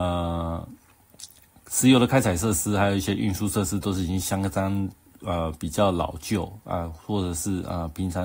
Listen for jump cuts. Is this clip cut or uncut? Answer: uncut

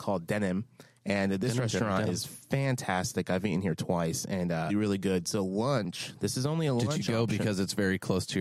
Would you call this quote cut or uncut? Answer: cut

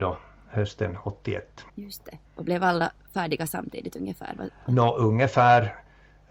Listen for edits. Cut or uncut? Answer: cut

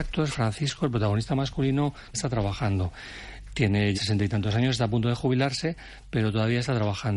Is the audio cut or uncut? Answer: cut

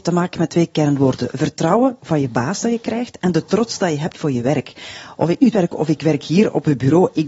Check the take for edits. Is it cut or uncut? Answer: cut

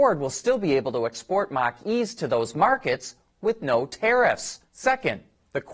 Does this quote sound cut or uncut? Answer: cut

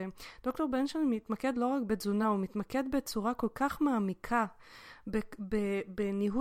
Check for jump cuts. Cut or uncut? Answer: uncut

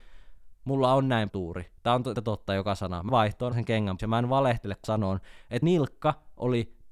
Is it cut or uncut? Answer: cut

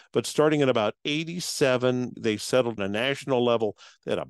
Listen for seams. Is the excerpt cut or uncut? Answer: cut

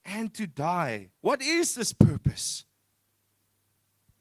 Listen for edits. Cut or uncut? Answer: cut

